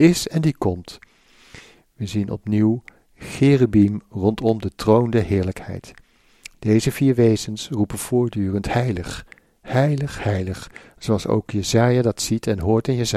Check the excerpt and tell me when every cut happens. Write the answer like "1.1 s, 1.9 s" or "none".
none

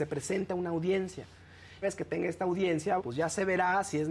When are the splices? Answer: 1.8 s, 3.0 s

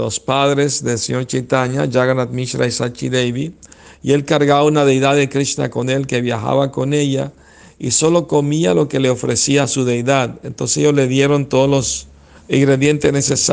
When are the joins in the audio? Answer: 12.4 s

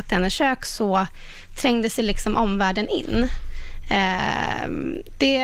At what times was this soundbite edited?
none

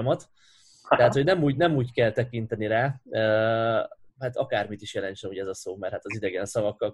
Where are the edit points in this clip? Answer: 4.0 s

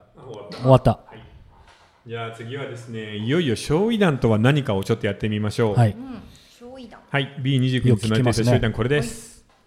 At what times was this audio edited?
none

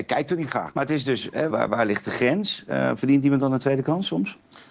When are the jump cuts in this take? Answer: 1.5 s

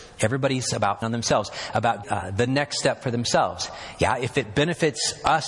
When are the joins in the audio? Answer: 1.0 s, 2.0 s

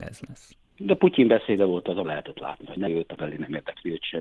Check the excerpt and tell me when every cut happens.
2.0 s, 2.9 s, 3.2 s

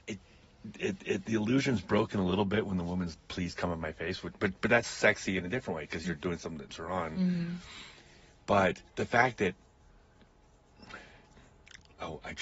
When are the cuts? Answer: 1.0 s, 3.1 s, 6.7 s, 8.9 s

